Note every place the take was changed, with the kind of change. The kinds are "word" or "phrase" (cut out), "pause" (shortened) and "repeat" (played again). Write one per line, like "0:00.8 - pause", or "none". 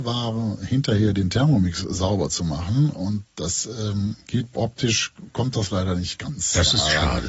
0:04.5 - word